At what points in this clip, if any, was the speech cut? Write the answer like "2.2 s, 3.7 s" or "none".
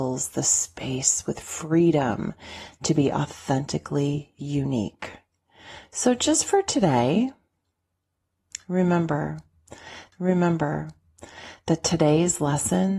10.1 s